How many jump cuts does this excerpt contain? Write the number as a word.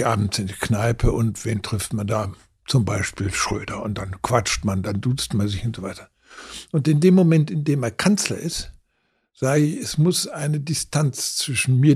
zero